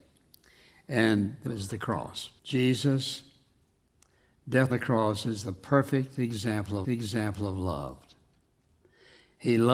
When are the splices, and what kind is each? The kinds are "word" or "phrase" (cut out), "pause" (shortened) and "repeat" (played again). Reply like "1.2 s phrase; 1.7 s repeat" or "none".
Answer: 1.5 s phrase; 2.4 s pause; 4.7 s word; 6.8 s repeat